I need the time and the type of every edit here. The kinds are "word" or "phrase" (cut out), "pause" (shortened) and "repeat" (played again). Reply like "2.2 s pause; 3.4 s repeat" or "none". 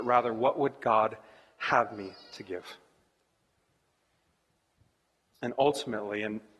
none

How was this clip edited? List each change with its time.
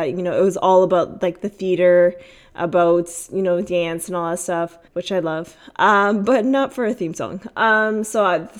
4.9 s pause

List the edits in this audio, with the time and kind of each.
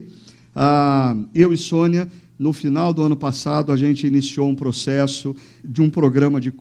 5.6 s word

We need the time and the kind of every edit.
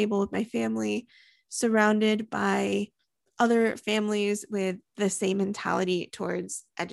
none

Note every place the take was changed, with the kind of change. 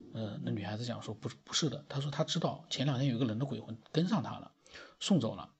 none

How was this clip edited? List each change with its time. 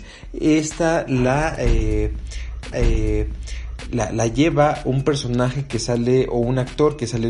2.7 s repeat

